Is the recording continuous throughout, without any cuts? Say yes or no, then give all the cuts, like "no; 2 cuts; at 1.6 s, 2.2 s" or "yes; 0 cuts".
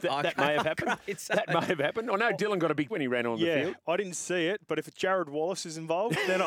no; 1 cut; at 2.9 s